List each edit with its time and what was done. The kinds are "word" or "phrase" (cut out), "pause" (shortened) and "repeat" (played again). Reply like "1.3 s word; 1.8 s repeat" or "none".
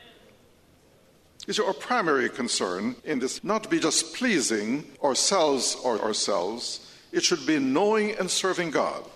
3.0 s pause; 3.4 s phrase; 4.9 s pause; 6.0 s word